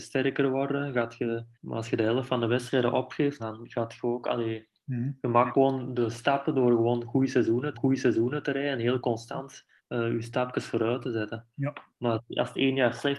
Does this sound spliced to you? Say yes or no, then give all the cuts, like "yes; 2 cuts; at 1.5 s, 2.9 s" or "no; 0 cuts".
yes; 5 cuts; at 1.5 s, 3.4 s, 5.5 s, 7.7 s, 9.8 s